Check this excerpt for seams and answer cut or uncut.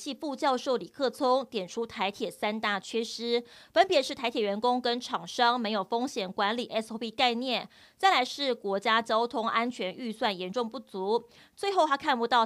uncut